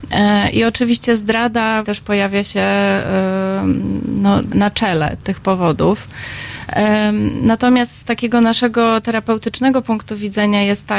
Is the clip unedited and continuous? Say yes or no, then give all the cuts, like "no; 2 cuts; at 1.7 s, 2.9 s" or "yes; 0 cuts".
no; 3 cuts; at 1.8 s, 4.5 s, 5.2 s